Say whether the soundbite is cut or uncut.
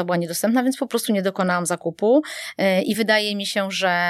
uncut